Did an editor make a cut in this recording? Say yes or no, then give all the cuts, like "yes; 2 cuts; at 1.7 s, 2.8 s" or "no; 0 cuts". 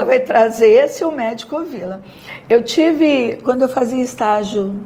no; 0 cuts